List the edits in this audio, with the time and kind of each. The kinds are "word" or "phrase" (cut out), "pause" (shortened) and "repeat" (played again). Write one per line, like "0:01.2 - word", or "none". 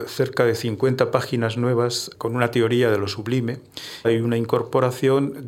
0:02.1 - word
0:04.0 - phrase